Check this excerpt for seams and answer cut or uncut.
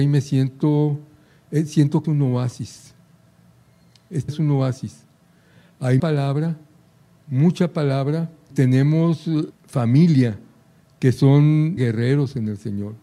cut